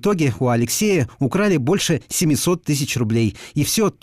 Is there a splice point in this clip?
no; 0 cuts

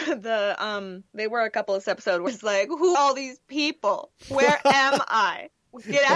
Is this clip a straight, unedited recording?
no; 4 cuts; at 1.1 s, 1.8 s, 2.3 s, 2.9 s

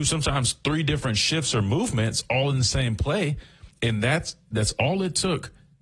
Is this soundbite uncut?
yes; 0 cuts

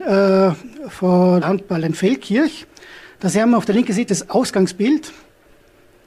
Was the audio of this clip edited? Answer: yes; 2 cuts; at 1.4 s, 4.1 s

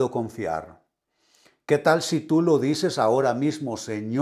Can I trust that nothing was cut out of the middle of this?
yes; 0 cuts

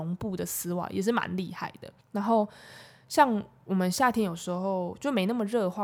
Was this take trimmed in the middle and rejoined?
yes; 1 cut; at 2.0 s

